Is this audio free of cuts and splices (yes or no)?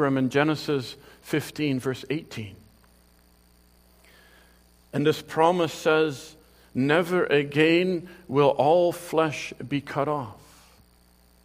yes